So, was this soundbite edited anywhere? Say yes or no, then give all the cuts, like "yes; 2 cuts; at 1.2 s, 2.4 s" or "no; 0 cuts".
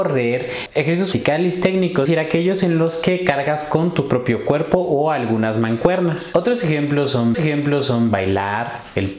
yes; 3 cuts; at 1.1 s, 2.1 s, 7.3 s